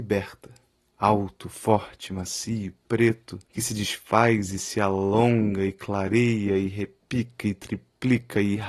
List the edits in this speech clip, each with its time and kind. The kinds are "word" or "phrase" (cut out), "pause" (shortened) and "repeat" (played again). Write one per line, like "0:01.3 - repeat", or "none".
0:03.4 - pause